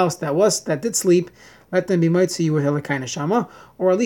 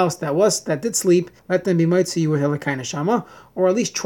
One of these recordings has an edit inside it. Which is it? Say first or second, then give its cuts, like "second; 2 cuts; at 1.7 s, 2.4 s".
second; 1 cut; at 1.4 s